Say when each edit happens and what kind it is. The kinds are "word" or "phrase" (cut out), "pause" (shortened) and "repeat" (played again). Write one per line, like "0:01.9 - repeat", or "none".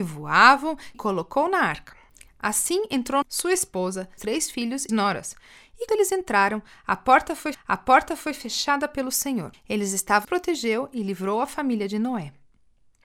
0:00.9 - phrase
0:02.1 - pause
0:03.2 - word
0:04.2 - word
0:04.9 - phrase
0:05.9 - word
0:07.5 - repeat
0:09.5 - pause
0:10.2 - phrase